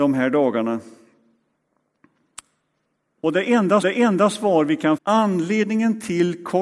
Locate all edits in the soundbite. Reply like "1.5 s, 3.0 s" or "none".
3.8 s, 5.0 s